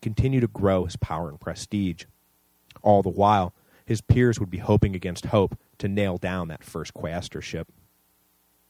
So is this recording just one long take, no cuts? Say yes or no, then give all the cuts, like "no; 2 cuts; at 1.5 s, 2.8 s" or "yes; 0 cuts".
yes; 0 cuts